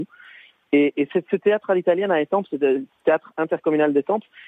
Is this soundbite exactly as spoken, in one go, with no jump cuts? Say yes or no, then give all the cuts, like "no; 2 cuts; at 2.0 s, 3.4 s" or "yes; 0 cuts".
yes; 0 cuts